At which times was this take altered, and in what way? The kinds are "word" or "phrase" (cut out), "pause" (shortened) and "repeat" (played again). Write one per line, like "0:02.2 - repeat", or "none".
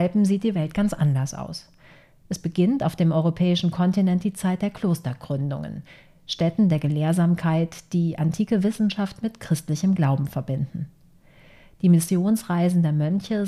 none